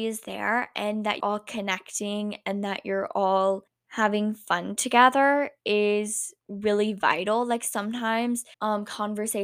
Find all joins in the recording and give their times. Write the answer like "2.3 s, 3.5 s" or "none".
1.2 s, 3.7 s, 6.4 s, 8.5 s